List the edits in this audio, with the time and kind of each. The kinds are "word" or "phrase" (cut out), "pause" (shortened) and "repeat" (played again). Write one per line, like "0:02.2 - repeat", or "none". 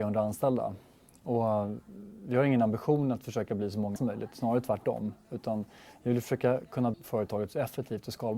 0:04.0 - word
0:06.9 - word